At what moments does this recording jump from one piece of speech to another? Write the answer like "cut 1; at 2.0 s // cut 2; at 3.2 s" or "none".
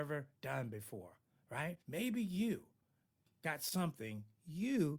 cut 1; at 1.8 s